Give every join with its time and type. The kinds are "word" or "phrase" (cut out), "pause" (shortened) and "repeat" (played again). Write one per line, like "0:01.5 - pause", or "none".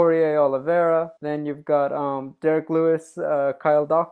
0:01.2 - pause